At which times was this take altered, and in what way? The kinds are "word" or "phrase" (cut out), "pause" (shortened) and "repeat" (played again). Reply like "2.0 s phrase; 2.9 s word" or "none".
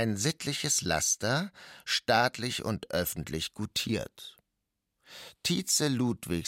none

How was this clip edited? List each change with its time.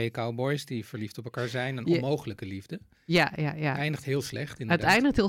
none

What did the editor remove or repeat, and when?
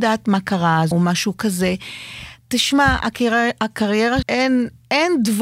0.9 s phrase; 4.2 s word

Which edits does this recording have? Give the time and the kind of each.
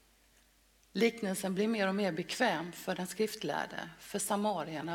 none

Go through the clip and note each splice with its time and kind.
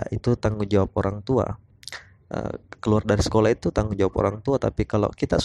2.8 s pause

